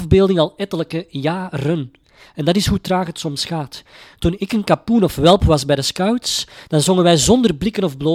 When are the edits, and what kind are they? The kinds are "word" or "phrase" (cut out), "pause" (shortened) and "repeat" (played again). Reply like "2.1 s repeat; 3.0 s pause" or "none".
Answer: none